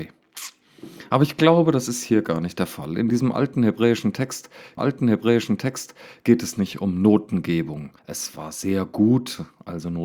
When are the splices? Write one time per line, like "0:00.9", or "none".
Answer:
0:04.8
0:08.0

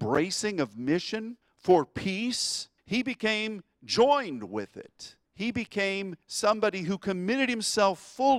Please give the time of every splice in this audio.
0:01.4
0:02.8
0:05.3
0:06.2

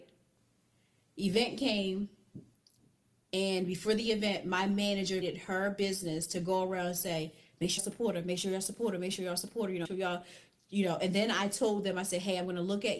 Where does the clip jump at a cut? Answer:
0:05.2
0:07.8
0:09.9

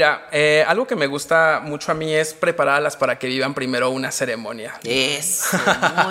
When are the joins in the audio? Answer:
0:03.0

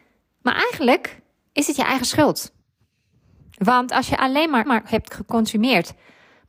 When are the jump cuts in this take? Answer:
0:04.7

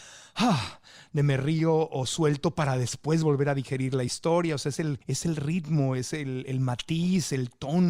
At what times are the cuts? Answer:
0:05.0

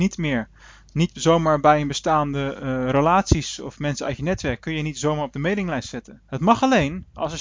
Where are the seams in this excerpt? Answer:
0:06.2

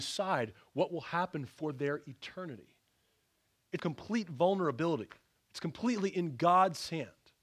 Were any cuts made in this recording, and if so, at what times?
0:03.8
0:05.4

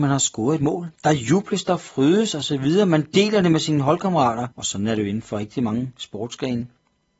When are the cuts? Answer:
0:00.9
0:04.5

